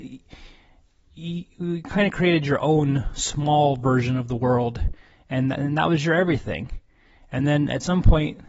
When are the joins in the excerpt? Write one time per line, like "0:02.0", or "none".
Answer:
none